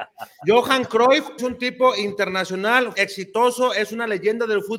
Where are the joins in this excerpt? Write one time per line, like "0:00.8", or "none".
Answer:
0:01.4
0:02.9